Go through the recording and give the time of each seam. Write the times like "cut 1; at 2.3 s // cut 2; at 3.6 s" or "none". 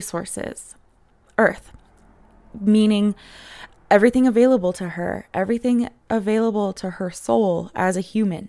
none